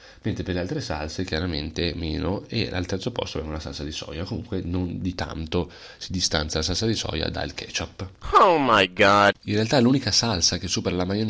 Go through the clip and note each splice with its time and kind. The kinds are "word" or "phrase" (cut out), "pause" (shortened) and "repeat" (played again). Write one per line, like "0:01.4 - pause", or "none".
0:09.4 - pause